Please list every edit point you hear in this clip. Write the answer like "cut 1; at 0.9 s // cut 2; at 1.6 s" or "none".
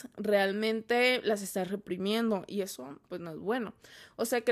cut 1; at 3.0 s